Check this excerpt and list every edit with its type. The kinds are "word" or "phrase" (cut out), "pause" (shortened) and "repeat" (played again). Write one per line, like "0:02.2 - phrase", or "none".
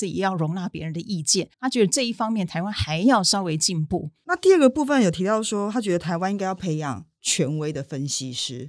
0:01.5 - pause